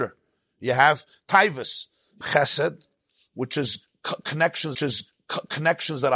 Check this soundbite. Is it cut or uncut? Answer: cut